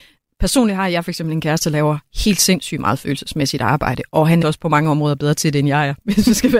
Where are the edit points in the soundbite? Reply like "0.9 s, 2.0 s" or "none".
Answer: 4.4 s